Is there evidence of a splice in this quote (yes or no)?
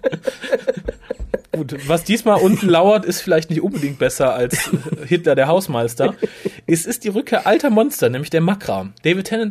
no